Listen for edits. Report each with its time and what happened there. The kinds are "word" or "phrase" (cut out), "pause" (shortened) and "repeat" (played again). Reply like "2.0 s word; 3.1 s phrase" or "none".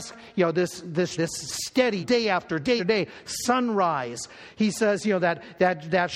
1.2 s word; 2.0 s word; 2.8 s word